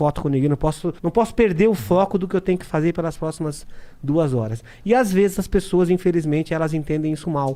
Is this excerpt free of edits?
no; 1 cut; at 1.0 s

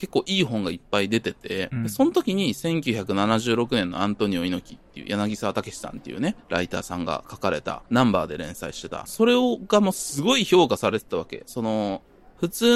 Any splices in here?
yes; 2 cuts; at 7.9 s, 9.1 s

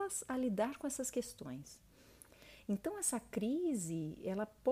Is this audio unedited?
yes; 0 cuts

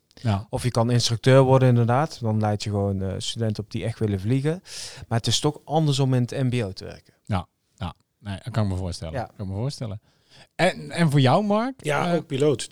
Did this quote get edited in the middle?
no; 0 cuts

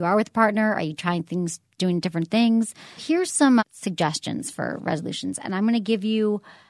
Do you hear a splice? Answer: yes; 2 cuts; at 3.0 s, 3.6 s

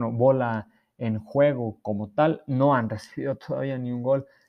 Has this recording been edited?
no; 0 cuts

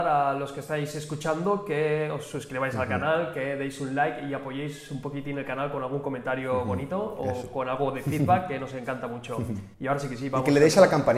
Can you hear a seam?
yes; 1 cut; at 9.7 s

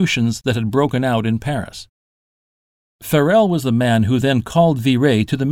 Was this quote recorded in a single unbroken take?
yes; 0 cuts

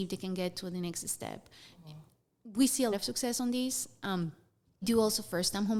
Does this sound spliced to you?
yes; 2 cuts; at 2.9 s, 4.8 s

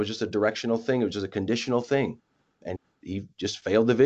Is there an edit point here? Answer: no; 0 cuts

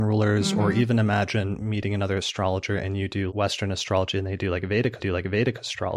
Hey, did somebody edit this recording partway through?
yes; 2 cuts; at 3.3 s, 5.0 s

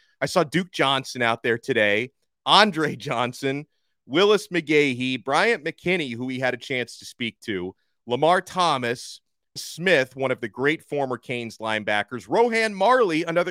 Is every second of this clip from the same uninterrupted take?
no; 1 cut; at 9.6 s

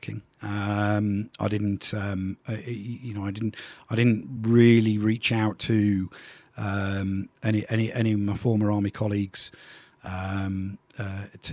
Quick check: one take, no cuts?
yes; 0 cuts

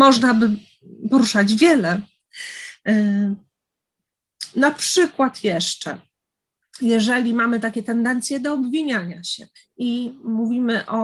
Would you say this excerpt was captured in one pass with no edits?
no; 1 cut; at 9.6 s

